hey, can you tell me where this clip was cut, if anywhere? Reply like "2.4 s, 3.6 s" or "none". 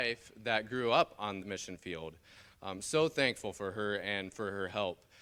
1.4 s